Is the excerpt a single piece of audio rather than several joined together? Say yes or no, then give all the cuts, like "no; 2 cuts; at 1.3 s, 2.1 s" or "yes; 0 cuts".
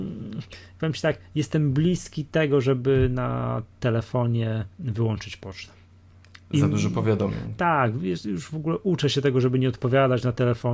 no; 2 cuts; at 4.7 s, 6.1 s